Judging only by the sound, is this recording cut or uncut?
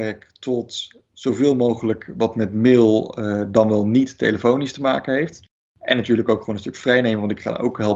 cut